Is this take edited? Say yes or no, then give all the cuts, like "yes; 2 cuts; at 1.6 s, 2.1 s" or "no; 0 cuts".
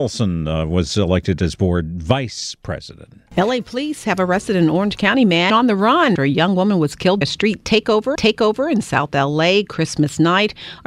yes; 4 cuts; at 5.5 s, 6.2 s, 7.2 s, 8.2 s